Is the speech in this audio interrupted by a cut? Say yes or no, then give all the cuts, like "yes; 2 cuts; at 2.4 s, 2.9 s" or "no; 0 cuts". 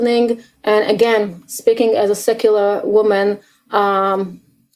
no; 0 cuts